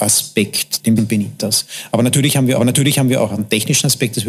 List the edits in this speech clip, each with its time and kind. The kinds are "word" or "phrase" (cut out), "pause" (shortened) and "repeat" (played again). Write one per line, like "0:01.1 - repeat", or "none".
0:01.0 - phrase
0:02.6 - repeat